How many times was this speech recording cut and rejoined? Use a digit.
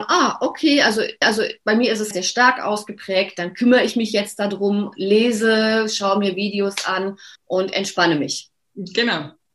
4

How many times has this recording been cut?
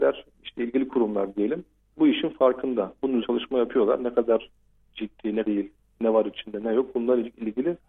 3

